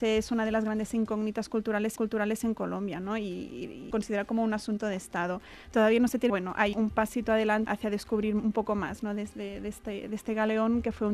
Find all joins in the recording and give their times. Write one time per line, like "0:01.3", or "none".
0:02.0
0:03.9
0:06.3
0:06.7
0:07.7